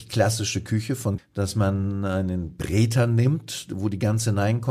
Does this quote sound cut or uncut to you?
cut